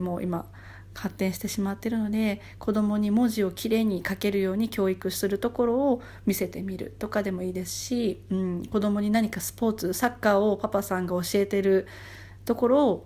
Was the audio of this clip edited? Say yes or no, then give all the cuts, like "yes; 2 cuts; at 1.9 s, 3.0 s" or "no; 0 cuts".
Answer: no; 0 cuts